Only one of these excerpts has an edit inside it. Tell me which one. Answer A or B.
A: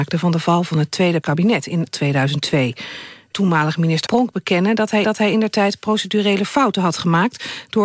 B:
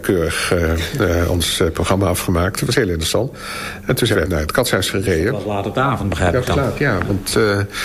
A